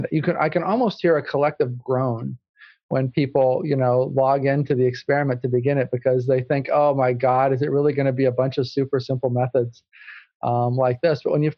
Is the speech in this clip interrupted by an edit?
no; 0 cuts

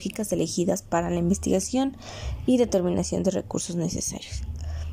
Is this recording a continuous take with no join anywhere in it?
yes; 0 cuts

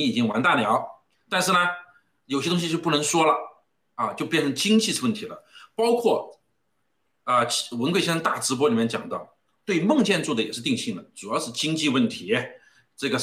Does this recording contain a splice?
no; 0 cuts

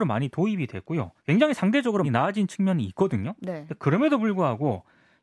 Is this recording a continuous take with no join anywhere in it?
no; 2 cuts; at 1.2 s, 2.0 s

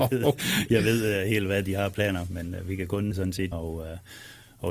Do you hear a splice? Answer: yes; 2 cuts; at 3.1 s, 3.5 s

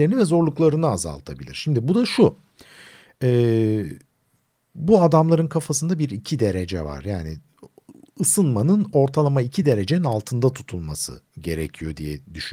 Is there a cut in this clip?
no; 0 cuts

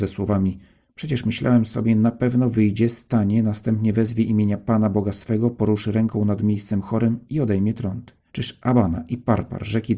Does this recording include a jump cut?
yes; 1 cut; at 8.3 s

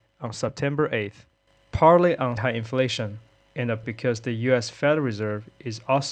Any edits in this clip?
yes; 2 cuts; at 2.4 s, 3.8 s

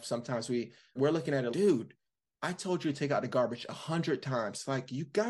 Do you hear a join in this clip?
yes; 2 cuts; at 1.0 s, 1.5 s

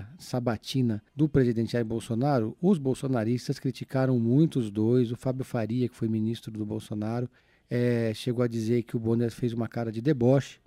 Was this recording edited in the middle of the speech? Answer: yes; 2 cuts; at 1.1 s, 7.4 s

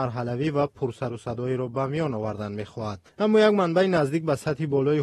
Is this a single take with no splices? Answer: no; 1 cut; at 3.1 s

